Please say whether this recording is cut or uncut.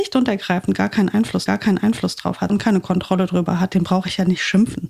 cut